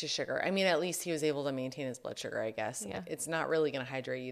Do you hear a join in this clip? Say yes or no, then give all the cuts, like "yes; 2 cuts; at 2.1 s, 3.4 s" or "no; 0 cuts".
no; 0 cuts